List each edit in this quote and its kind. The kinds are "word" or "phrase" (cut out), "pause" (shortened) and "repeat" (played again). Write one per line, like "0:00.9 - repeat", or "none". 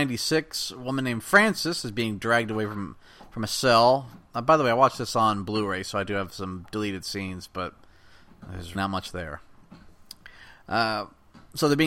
0:08.7 - word